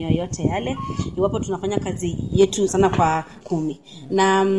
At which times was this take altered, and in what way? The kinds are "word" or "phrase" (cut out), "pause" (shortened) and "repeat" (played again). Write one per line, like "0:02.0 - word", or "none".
0:02.7 - word
0:03.4 - phrase

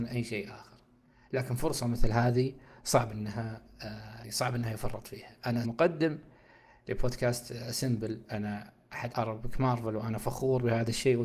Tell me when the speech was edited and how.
0:04.2 - word
0:05.6 - word
0:09.1 - word

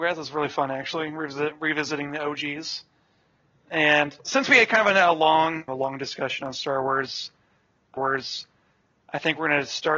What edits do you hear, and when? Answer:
0:05.7 - phrase
0:08.0 - repeat

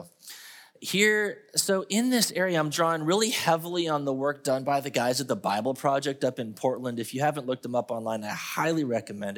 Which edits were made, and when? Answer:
none

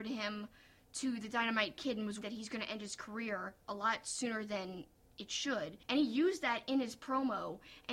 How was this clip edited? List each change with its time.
0:02.2 - word
0:05.8 - pause

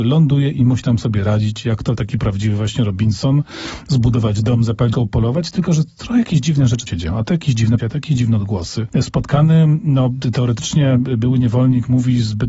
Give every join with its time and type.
0:04.9 - word
0:06.9 - word
0:07.8 - word

